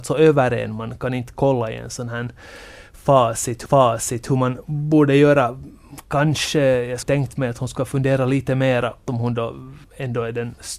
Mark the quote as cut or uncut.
cut